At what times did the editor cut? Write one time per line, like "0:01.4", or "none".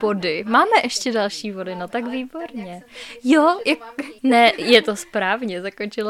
0:04.2